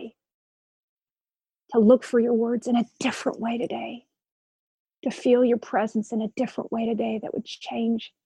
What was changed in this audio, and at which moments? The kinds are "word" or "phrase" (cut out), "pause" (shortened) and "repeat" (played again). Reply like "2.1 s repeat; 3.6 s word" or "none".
none